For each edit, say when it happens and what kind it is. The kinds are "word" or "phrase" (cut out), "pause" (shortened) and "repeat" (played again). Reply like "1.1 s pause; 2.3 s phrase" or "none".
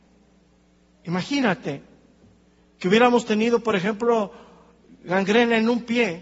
none